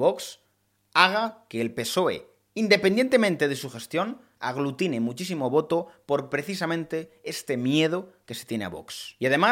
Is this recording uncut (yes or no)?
yes